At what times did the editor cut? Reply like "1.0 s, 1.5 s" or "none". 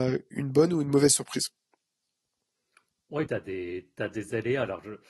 3.3 s